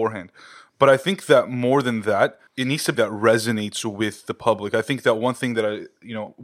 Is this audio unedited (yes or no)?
no